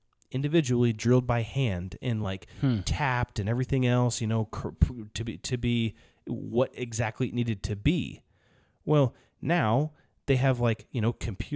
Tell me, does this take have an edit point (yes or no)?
no